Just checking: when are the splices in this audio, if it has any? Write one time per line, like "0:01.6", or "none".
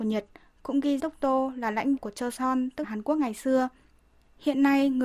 0:01.0
0:02.0
0:02.8